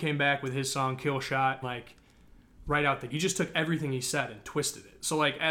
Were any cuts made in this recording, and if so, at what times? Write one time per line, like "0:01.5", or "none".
0:01.6
0:03.1